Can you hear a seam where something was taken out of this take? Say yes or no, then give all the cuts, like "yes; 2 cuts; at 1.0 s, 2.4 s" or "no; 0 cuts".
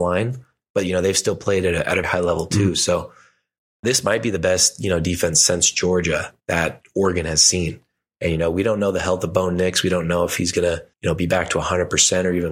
yes; 3 cuts; at 2.0 s, 6.4 s, 10.9 s